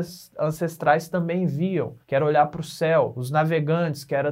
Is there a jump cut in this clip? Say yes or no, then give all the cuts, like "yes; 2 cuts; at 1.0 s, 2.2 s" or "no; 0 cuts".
yes; 1 cut; at 2.0 s